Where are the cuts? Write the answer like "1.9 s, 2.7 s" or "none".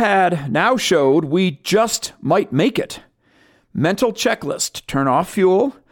none